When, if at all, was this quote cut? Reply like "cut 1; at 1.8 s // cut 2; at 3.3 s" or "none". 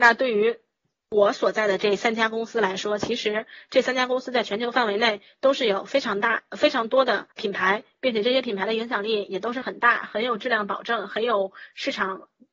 cut 1; at 7.3 s